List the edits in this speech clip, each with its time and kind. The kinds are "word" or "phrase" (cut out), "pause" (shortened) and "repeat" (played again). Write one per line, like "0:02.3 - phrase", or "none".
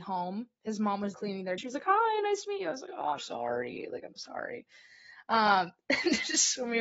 0:01.1 - word
0:01.6 - word
0:03.2 - word
0:04.1 - word